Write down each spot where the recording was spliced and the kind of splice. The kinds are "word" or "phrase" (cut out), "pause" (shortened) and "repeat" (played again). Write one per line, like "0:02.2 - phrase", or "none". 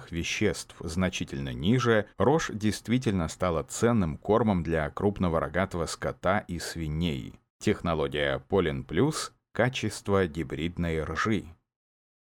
0:02.1 - pause
0:07.5 - pause